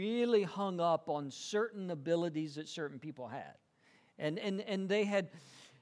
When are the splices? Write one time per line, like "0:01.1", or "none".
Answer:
none